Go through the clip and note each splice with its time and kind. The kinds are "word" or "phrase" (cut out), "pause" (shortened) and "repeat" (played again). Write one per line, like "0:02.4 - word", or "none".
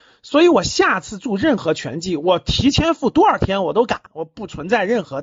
0:04.1 - pause